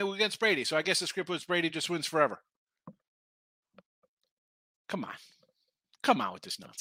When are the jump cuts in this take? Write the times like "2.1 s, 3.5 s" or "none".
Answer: none